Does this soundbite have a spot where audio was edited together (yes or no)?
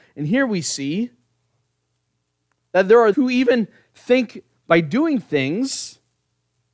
yes